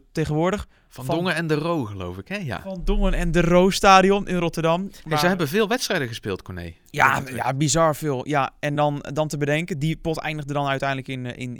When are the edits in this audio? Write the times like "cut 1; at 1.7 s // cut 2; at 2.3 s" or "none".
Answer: none